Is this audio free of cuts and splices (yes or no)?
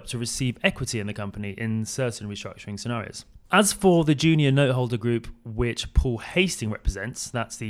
no